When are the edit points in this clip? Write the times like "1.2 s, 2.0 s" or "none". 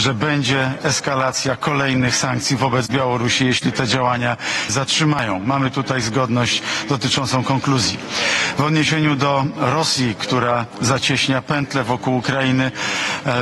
4.7 s